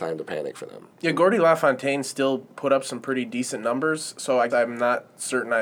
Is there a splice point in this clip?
yes; 2 cuts; at 0.9 s, 4.5 s

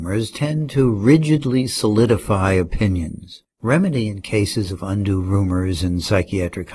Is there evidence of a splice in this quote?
yes; 1 cut; at 3.5 s

